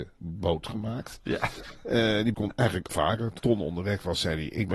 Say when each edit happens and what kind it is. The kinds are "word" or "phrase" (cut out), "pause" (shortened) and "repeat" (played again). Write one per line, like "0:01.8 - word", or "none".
0:02.3 - word
0:02.9 - word
0:03.4 - phrase